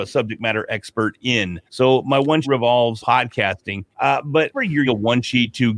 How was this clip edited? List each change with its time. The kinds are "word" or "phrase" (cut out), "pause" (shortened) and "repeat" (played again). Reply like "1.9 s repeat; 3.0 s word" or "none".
1.7 s pause; 2.4 s word; 3.0 s word; 3.9 s pause; 4.5 s word; 4.9 s word